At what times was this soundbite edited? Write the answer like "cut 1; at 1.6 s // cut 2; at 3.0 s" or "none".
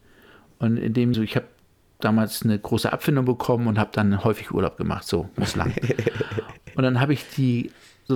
cut 1; at 1.1 s // cut 2; at 5.4 s